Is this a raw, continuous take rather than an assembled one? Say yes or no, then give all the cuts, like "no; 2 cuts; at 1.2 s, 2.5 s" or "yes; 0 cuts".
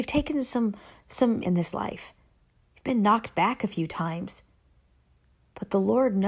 no; 1 cut; at 1.4 s